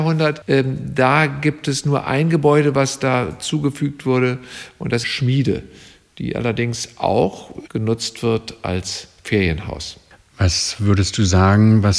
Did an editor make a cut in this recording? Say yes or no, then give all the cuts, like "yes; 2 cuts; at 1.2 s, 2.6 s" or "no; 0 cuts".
yes; 2 cuts; at 5.0 s, 7.7 s